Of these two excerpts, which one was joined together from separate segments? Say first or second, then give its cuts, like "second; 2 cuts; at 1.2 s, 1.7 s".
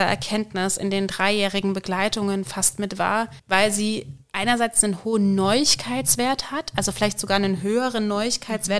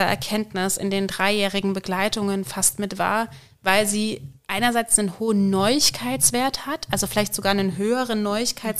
first; 1 cut; at 3.4 s